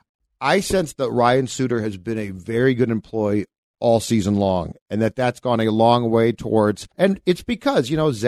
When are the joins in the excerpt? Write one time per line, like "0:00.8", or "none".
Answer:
0:06.9

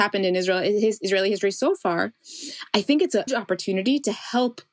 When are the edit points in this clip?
0:03.3

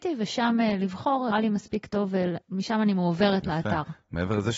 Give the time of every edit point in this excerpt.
0:01.3
0:02.4

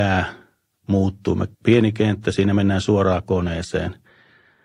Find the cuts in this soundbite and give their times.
0:01.5

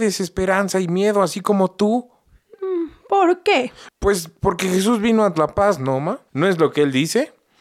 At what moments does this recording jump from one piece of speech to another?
0:05.3
0:06.3

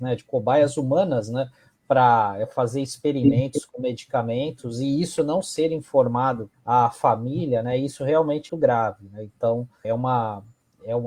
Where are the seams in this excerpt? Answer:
0:06.5
0:08.5
0:09.8

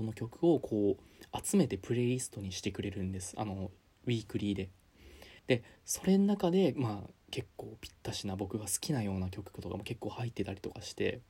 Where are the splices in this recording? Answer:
0:05.4

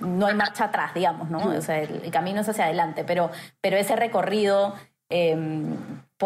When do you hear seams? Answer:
none

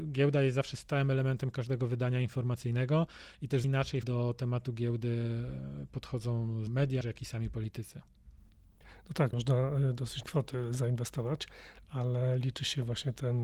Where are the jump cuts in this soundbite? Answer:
0:03.6
0:04.0
0:06.7
0:07.0
0:09.3
0:10.2

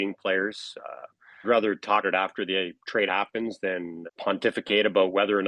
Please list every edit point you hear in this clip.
0:01.4
0:02.0
0:03.1
0:04.1

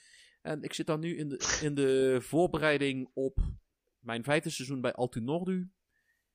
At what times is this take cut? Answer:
none

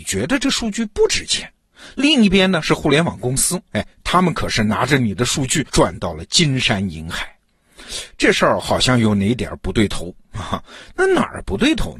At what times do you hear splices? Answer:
0:05.7

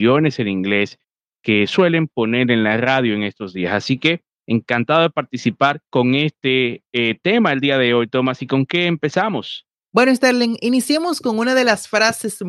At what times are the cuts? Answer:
0:05.9

